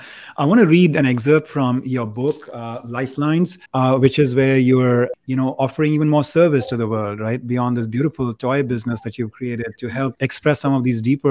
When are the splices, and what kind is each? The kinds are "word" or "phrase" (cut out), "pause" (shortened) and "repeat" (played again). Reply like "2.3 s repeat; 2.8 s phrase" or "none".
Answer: 3.7 s pause; 10.1 s word